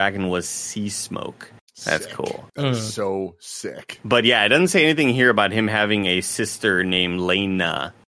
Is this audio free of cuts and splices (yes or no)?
no